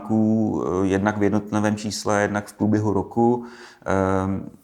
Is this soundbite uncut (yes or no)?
yes